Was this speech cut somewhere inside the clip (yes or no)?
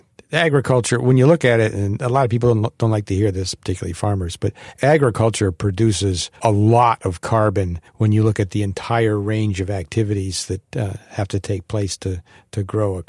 yes